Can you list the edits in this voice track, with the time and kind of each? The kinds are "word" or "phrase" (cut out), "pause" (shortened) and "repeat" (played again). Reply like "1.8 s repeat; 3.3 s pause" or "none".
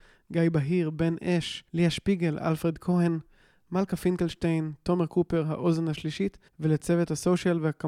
1.7 s pause; 6.5 s pause